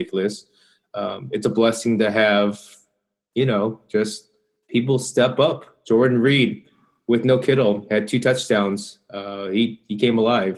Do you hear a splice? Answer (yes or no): no